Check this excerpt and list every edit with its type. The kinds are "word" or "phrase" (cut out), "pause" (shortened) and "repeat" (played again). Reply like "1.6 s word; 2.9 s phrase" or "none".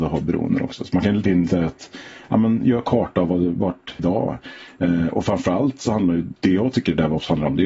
1.2 s word; 4.0 s phrase; 6.4 s pause